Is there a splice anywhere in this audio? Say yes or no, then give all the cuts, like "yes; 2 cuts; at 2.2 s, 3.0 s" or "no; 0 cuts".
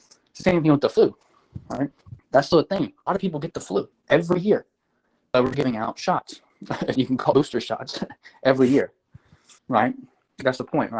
yes; 8 cuts; at 2.2 s, 3.1 s, 3.9 s, 5.5 s, 6.5 s, 6.9 s, 7.3 s, 9.6 s